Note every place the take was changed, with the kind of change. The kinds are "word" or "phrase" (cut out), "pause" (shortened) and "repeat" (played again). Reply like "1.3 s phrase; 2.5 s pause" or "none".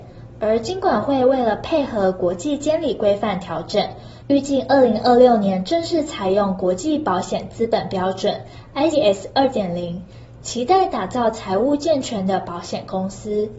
8.9 s word